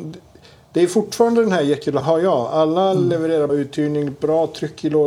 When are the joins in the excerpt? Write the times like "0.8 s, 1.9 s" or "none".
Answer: 2.0 s, 3.5 s